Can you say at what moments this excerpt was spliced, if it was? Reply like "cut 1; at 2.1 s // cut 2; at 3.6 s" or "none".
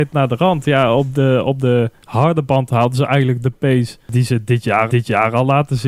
cut 1; at 4.9 s